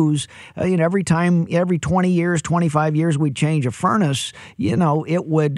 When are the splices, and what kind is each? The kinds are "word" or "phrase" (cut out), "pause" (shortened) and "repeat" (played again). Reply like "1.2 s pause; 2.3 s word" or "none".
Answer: none